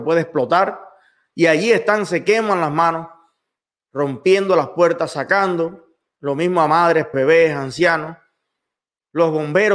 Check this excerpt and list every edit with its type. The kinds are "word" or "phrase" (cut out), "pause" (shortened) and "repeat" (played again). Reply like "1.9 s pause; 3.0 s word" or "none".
7.1 s word